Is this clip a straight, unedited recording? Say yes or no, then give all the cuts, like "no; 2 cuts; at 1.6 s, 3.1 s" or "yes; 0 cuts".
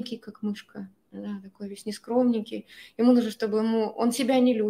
yes; 0 cuts